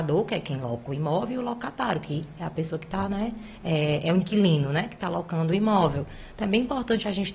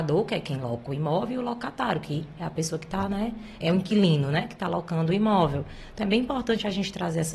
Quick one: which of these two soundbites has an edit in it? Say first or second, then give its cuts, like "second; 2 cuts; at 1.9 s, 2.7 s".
second; 1 cut; at 3.6 s